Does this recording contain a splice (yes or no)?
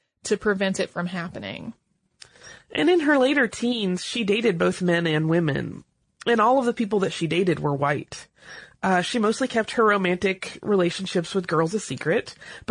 no